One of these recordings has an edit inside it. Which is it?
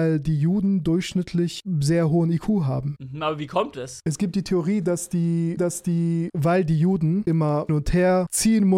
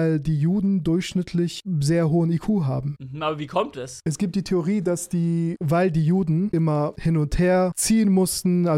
first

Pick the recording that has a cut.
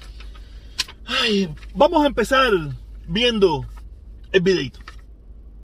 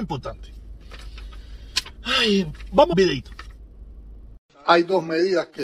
second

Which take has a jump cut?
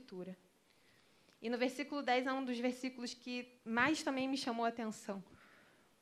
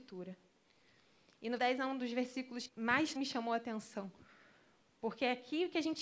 second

